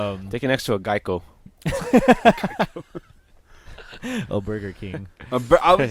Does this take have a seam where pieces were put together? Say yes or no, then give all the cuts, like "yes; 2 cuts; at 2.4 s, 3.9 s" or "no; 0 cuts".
no; 0 cuts